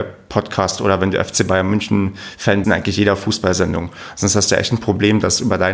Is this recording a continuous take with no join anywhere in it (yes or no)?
no